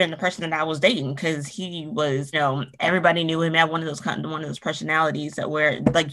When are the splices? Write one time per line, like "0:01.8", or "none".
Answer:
0:02.3